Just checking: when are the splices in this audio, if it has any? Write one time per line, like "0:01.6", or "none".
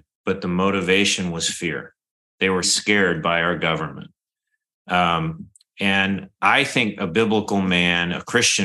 0:02.6